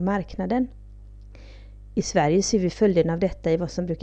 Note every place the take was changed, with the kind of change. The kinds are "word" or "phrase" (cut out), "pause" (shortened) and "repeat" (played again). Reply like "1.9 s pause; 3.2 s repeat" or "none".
none